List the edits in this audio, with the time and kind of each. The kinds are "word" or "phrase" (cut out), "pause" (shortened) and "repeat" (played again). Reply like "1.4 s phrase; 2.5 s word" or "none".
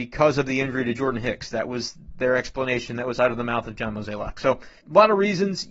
4.8 s pause